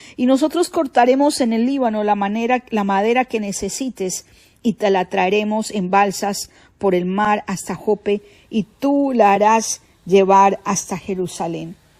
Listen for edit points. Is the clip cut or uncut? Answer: uncut